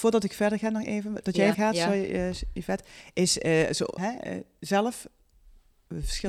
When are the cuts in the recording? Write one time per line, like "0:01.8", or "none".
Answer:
0:01.5
0:04.0